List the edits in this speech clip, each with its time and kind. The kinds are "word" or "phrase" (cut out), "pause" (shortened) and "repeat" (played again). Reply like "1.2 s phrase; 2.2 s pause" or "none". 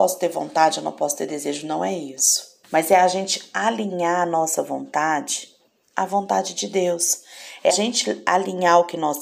2.6 s pause; 5.8 s pause; 7.7 s word